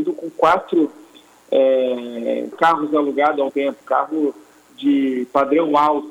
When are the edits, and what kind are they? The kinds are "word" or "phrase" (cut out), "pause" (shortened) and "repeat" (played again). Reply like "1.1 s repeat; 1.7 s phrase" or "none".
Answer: 2.5 s word; 3.5 s word; 3.8 s word